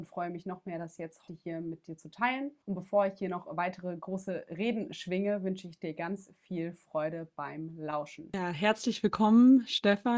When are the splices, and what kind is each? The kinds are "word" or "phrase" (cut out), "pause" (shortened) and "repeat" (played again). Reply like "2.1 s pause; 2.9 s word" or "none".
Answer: 1.3 s word; 2.6 s pause